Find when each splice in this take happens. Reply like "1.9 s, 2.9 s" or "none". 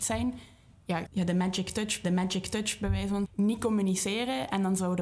1.1 s, 2.0 s, 3.3 s